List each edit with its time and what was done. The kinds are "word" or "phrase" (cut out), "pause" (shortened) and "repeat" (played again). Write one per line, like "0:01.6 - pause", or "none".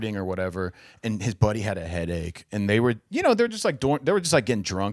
none

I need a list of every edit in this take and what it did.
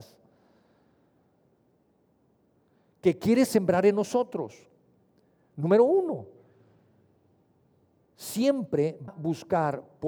0:09.1 - word

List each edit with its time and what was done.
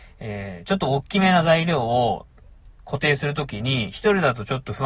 0:02.7 - pause

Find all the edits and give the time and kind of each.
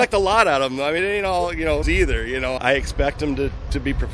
0:01.0 - word
0:01.8 - word
0:02.6 - word

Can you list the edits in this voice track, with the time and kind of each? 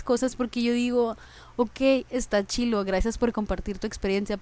none

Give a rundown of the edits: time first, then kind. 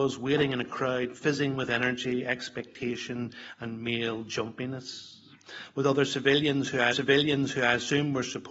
0:06.9 - repeat

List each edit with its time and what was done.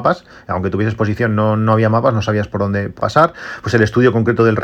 0:03.0 - word

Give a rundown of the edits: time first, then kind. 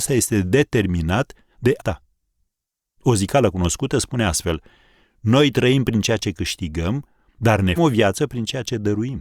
0:01.8 - word
0:07.8 - word

